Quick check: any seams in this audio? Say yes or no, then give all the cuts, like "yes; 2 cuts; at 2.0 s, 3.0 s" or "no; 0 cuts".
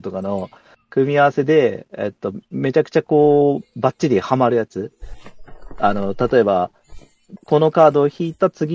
yes; 1 cut; at 7.4 s